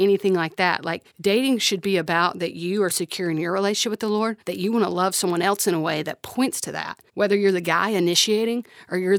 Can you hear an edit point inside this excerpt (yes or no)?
yes